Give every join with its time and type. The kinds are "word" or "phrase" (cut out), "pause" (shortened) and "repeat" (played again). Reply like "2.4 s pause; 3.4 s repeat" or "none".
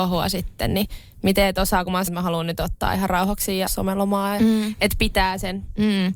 2.1 s word; 3.7 s word; 4.4 s phrase